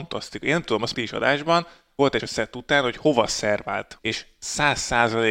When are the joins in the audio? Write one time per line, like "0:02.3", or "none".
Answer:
0:00.9
0:02.2
0:04.0